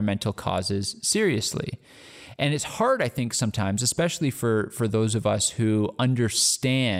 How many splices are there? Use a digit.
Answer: 0